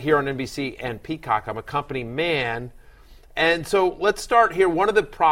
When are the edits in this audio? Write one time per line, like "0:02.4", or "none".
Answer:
none